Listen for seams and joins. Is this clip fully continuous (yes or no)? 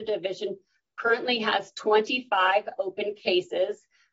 yes